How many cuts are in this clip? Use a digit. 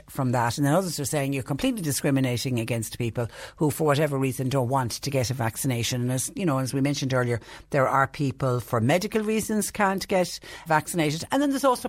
1